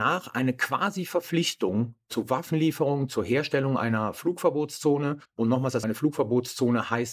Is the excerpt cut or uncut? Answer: cut